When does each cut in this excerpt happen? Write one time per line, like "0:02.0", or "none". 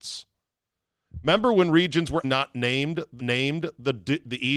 0:02.2
0:03.2